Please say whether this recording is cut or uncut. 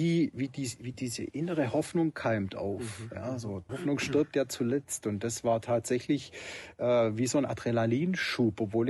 cut